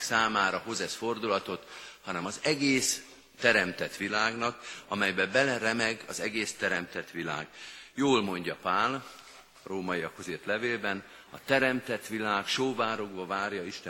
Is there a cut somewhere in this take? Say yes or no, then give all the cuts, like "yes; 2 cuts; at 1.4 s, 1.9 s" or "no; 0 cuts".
no; 0 cuts